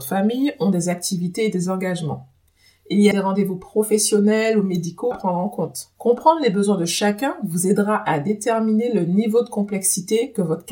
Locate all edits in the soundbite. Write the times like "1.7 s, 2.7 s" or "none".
3.1 s, 5.1 s, 5.9 s